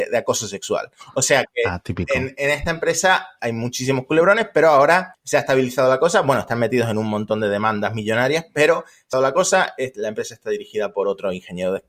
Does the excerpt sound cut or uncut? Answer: cut